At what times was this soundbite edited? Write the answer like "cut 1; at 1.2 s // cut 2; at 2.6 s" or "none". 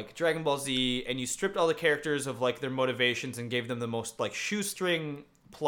none

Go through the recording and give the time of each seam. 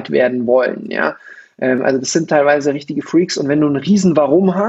none

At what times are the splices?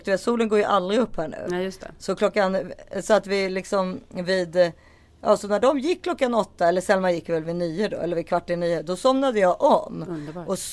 none

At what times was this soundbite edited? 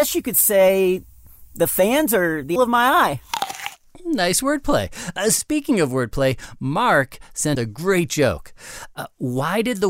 cut 1; at 2.6 s // cut 2; at 7.6 s

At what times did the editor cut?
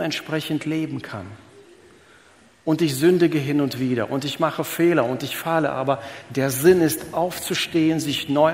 none

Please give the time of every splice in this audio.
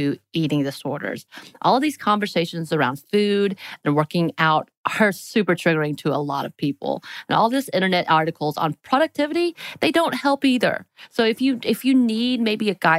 none

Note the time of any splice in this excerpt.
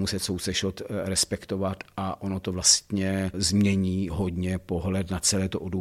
none

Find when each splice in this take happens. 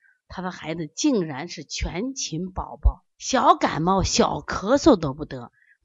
cut 1; at 3.1 s

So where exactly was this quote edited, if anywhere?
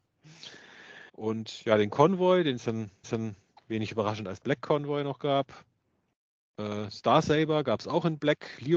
cut 1; at 1.1 s // cut 2; at 3.0 s

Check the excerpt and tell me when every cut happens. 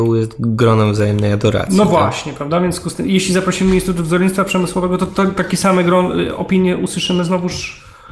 none

